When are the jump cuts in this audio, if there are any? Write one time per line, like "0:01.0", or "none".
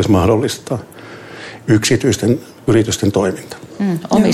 none

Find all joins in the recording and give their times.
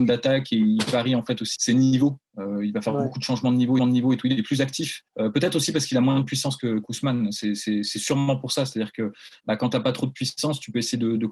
0:01.6
0:03.8
0:05.1

